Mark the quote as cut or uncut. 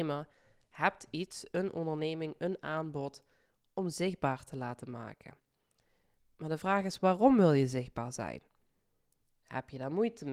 uncut